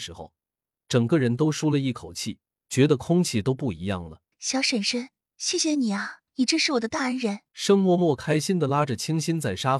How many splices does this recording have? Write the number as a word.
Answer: three